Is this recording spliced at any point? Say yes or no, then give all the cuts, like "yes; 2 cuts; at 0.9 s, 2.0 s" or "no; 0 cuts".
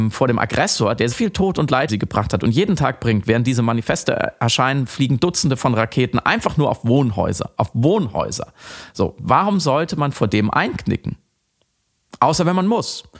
yes; 2 cuts; at 1.1 s, 1.9 s